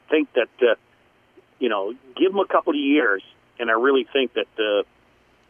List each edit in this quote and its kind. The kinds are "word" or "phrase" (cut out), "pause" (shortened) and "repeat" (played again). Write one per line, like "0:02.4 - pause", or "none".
none